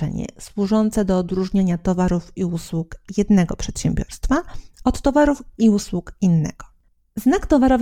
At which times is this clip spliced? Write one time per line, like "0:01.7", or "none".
none